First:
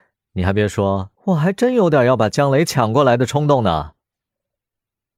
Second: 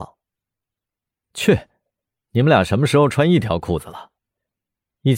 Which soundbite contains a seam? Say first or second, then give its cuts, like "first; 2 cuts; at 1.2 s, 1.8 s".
first; 1 cut; at 1.2 s